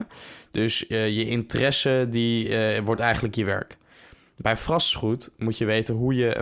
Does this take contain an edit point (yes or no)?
no